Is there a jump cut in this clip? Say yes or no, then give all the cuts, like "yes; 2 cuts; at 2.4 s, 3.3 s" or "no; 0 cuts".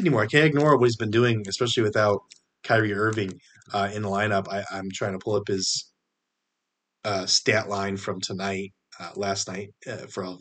no; 0 cuts